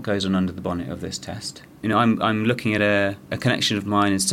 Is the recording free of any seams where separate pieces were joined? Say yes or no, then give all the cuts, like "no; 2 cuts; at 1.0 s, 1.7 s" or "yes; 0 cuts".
yes; 0 cuts